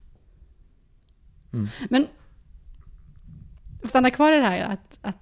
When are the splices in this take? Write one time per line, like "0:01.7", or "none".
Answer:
0:03.9